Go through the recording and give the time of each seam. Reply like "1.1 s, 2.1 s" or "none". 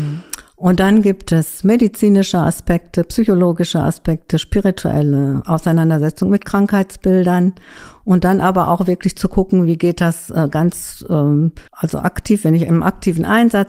11.7 s